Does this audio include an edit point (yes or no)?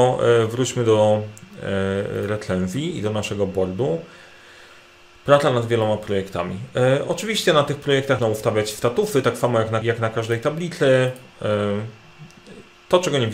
yes